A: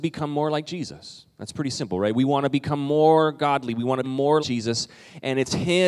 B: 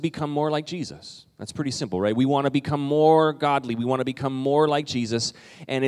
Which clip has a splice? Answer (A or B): A